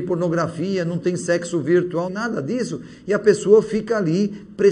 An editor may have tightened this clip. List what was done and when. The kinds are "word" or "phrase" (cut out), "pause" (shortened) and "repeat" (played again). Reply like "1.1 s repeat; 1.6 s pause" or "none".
2.1 s phrase